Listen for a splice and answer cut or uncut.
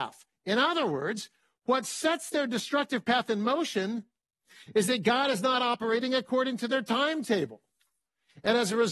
uncut